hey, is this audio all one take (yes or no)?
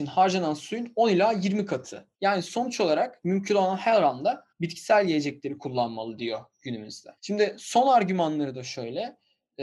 no